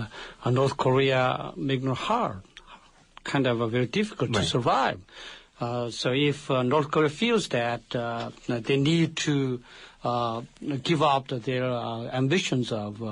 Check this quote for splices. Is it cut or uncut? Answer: uncut